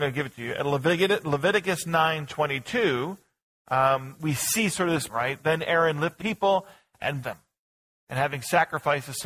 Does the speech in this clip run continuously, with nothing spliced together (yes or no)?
no